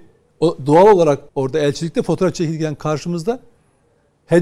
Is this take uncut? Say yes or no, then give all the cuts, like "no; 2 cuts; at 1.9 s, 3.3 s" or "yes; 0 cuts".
no; 1 cut; at 1.3 s